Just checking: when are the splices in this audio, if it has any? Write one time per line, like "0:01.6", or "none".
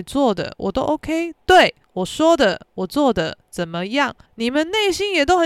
0:01.8
0:04.3